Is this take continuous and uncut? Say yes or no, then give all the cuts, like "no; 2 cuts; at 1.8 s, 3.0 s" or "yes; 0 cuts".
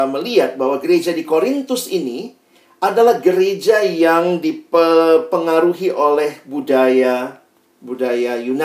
yes; 0 cuts